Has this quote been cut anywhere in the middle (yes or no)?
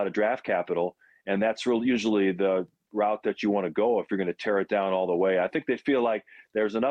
no